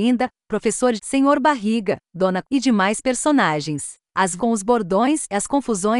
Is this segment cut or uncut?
cut